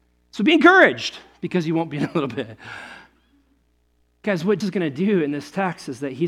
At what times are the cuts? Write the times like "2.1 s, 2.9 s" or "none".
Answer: 4.6 s